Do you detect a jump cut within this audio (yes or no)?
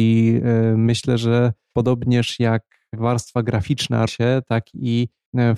yes